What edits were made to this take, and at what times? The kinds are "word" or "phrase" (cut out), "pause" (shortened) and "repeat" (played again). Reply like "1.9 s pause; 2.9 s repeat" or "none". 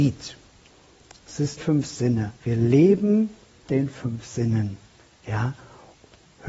1.6 s phrase; 2.4 s pause; 3.7 s word